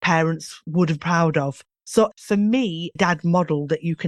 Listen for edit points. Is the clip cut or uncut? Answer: cut